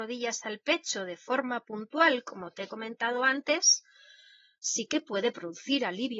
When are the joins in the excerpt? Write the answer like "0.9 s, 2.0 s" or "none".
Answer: none

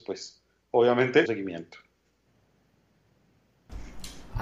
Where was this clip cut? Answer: 1.3 s

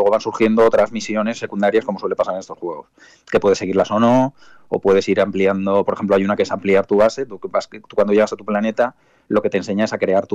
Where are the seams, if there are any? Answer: none

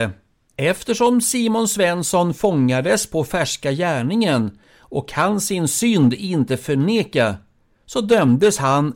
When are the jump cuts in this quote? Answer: none

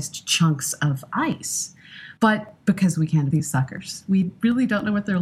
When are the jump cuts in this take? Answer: 2.2 s, 3.3 s

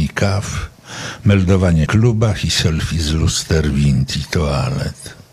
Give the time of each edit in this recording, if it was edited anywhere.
1.9 s

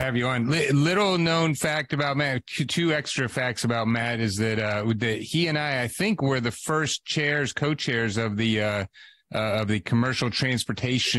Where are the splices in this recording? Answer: none

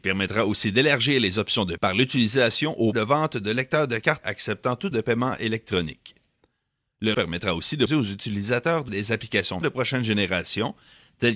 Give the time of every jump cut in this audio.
1.8 s, 2.9 s, 4.2 s, 4.9 s, 7.1 s, 7.9 s, 8.9 s, 9.6 s

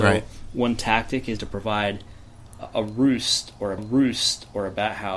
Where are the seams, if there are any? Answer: 1.4 s, 3.8 s

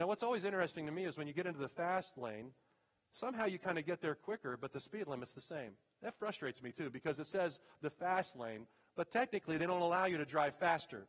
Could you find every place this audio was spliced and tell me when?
none

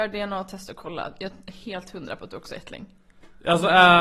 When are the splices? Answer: none

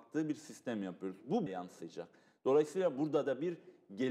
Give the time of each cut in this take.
1.5 s

